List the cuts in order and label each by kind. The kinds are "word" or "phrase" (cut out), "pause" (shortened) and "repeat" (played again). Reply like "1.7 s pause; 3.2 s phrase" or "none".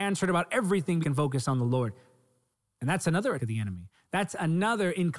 1.0 s phrase; 3.4 s word